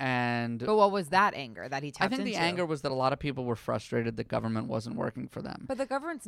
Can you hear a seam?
no; 0 cuts

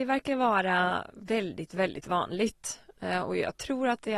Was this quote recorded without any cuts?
yes; 0 cuts

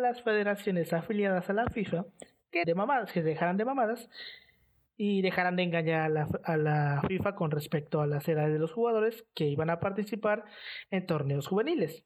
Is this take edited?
yes; 1 cut; at 2.6 s

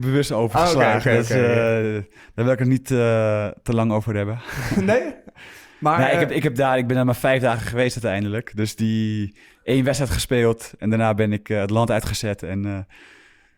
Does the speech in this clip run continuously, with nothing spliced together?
yes; 0 cuts

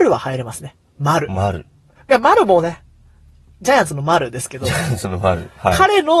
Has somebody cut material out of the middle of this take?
no; 0 cuts

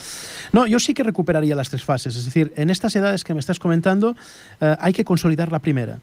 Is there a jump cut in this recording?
no; 0 cuts

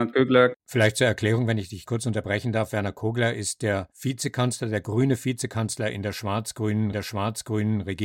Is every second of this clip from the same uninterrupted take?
no; 3 cuts; at 1.9 s, 3.9 s, 6.9 s

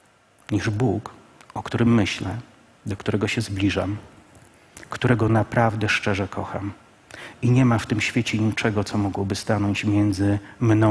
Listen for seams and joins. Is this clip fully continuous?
yes; 0 cuts

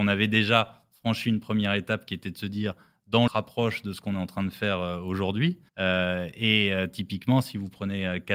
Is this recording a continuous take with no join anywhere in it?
no; 2 cuts; at 3.3 s, 5.7 s

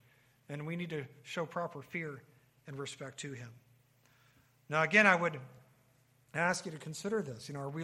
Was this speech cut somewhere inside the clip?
no; 0 cuts

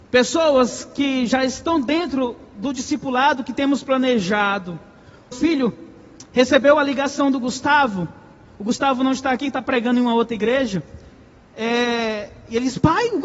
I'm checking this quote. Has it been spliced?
yes; 1 cut; at 5.3 s

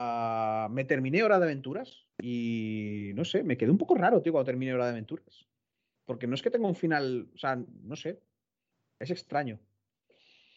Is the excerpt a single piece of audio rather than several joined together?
no; 1 cut; at 2.1 s

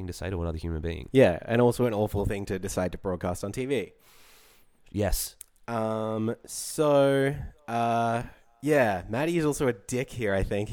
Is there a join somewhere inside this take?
no; 0 cuts

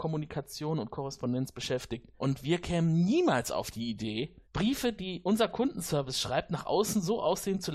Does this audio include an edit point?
yes; 2 cuts; at 2.2 s, 4.4 s

